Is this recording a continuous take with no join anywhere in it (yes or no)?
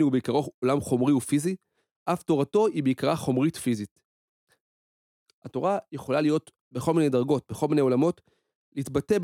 yes